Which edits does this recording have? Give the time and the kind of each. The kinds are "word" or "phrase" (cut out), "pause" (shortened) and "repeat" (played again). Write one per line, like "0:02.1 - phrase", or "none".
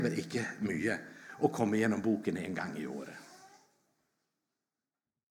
none